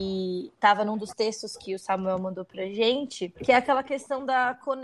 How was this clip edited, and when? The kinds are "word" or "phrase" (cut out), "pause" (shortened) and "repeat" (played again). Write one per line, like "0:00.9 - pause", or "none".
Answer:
0:03.4 - pause